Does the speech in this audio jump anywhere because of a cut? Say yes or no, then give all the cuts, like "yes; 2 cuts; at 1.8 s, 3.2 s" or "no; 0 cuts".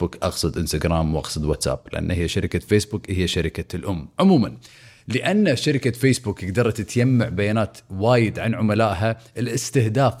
no; 0 cuts